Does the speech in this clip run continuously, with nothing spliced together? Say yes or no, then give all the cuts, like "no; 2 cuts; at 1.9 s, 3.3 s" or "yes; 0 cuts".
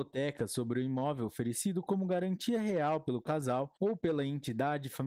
no; 1 cut; at 3.8 s